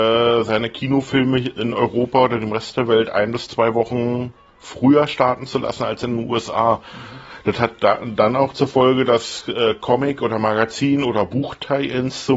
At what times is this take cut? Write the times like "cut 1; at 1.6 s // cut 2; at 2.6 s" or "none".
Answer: none